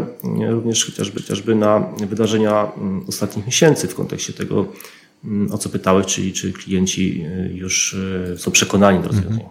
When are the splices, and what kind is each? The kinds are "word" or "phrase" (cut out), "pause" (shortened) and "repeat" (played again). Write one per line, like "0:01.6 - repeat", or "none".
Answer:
0:01.2 - repeat